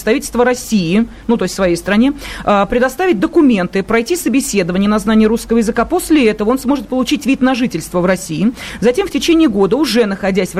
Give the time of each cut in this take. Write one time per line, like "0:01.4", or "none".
none